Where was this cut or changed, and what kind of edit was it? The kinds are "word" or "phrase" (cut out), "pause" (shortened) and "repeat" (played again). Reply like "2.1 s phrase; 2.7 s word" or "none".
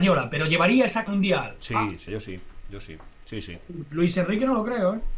1.0 s phrase; 2.1 s word